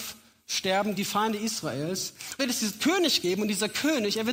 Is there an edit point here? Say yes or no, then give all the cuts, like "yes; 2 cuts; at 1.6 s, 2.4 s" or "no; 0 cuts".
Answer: yes; 2 cuts; at 0.9 s, 2.4 s